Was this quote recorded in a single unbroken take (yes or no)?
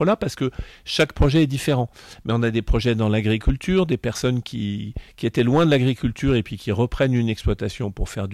yes